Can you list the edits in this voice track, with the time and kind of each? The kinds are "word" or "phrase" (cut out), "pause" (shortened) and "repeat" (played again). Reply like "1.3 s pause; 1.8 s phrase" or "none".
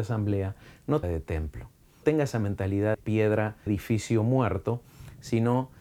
1.0 s phrase; 2.0 s word; 2.9 s word; 3.7 s word